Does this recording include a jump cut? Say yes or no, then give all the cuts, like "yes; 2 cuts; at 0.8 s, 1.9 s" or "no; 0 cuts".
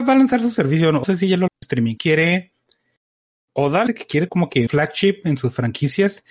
yes; 6 cuts; at 1.0 s, 1.5 s, 2.0 s, 3.9 s, 4.3 s, 4.7 s